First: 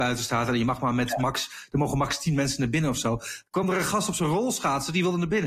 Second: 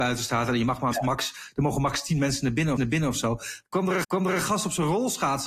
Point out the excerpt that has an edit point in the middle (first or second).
second